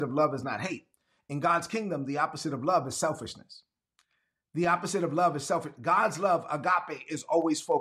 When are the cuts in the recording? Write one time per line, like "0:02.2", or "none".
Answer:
none

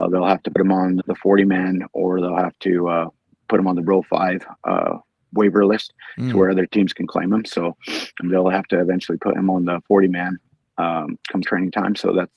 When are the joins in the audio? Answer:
0:01.0
0:08.2
0:11.4

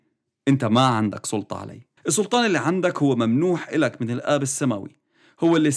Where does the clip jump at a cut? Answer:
0:02.0

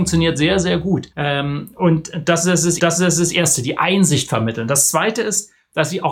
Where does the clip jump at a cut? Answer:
0:01.1
0:02.8

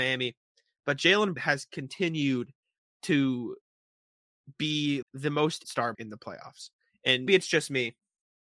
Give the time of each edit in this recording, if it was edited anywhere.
0:01.4
0:05.0
0:05.6
0:05.9
0:07.3

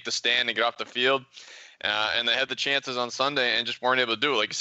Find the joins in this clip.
none

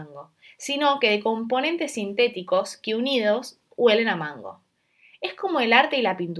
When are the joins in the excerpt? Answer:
none

